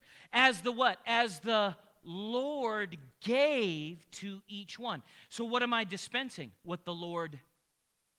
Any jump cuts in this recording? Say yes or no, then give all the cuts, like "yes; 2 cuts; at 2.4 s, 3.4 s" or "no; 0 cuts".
no; 0 cuts